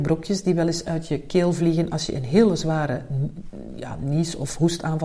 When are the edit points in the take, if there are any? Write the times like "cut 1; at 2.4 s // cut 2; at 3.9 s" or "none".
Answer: none